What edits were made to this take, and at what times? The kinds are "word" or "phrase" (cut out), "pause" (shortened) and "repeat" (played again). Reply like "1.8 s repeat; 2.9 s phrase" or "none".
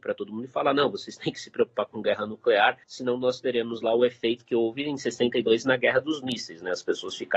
2.8 s pause